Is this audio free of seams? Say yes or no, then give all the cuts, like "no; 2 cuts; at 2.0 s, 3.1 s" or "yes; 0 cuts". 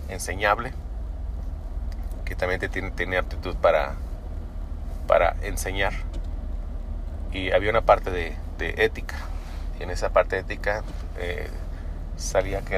yes; 0 cuts